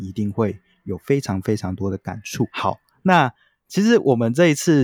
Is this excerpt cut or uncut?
uncut